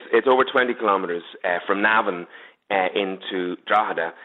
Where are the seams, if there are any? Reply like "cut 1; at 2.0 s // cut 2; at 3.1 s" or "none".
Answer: none